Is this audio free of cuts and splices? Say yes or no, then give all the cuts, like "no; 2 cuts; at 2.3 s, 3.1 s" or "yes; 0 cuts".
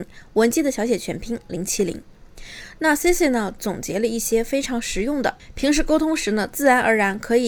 yes; 0 cuts